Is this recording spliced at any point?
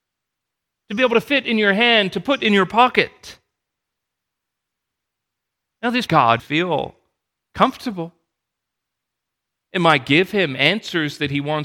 yes; 2 cuts; at 6.1 s, 6.4 s

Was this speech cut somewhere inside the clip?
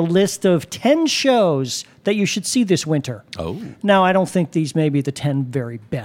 no; 0 cuts

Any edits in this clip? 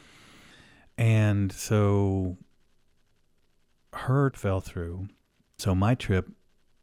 yes; 2 cuts; at 4.3 s, 5.6 s

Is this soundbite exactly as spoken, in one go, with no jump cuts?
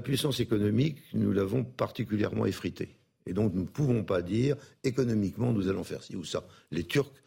yes; 0 cuts

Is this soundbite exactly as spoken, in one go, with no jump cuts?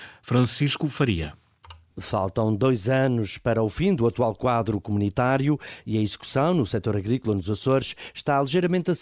yes; 0 cuts

